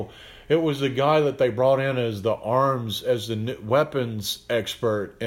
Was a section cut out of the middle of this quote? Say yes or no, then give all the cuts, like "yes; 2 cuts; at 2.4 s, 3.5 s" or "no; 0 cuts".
no; 0 cuts